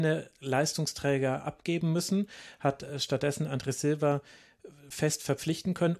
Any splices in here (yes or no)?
no